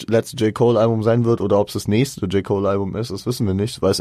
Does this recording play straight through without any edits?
yes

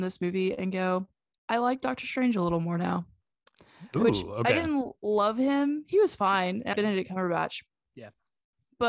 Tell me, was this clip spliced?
yes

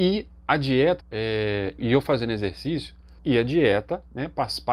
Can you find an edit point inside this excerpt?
yes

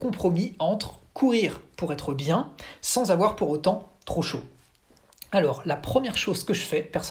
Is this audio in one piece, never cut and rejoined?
yes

